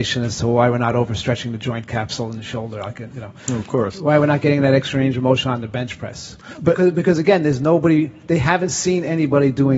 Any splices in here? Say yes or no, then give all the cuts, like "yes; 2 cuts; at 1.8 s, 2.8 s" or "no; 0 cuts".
no; 0 cuts